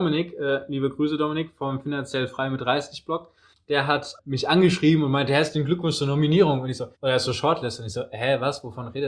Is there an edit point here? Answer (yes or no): yes